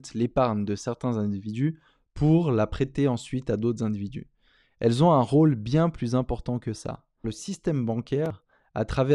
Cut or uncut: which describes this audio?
cut